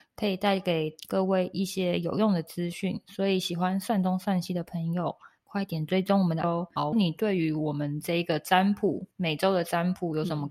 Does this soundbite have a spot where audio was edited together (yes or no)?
yes